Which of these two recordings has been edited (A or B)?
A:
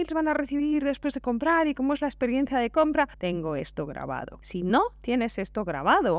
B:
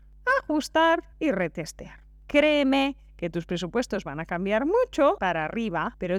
B